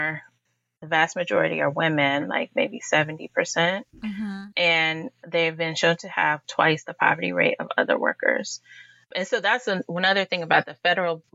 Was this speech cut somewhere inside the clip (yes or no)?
no